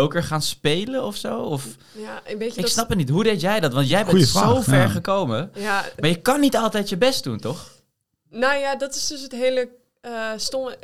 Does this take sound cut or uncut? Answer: uncut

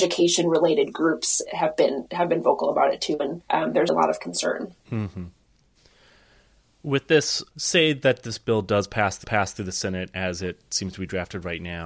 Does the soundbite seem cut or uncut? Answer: cut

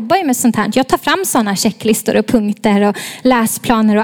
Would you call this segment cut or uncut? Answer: uncut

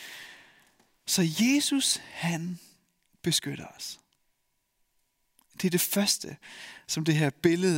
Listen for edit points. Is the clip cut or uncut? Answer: uncut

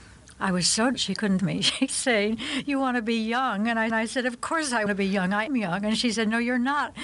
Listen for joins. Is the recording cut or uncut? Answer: cut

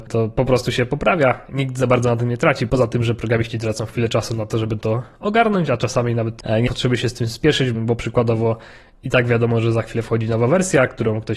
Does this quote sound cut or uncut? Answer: cut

